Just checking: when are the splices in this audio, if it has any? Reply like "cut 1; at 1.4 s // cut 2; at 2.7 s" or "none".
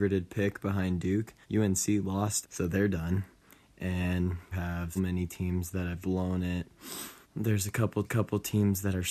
cut 1; at 1.4 s // cut 2; at 2.4 s // cut 3; at 4.5 s // cut 4; at 5.0 s // cut 5; at 6.0 s // cut 6; at 7.2 s // cut 7; at 8.0 s